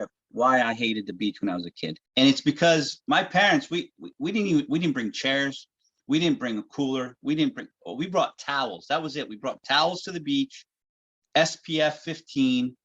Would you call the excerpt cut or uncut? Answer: cut